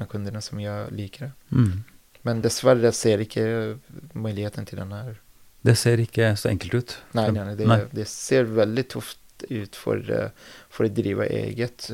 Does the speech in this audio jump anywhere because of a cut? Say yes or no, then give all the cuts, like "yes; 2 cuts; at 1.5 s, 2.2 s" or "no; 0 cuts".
no; 0 cuts